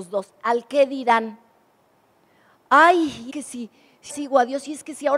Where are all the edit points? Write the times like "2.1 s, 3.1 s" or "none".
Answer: 3.3 s, 4.1 s